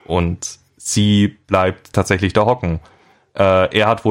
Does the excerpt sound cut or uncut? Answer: uncut